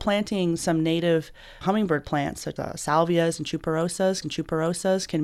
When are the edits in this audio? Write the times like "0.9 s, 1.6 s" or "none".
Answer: 1.6 s, 2.6 s, 4.2 s

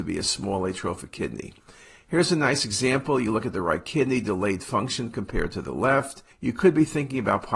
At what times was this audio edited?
6.3 s

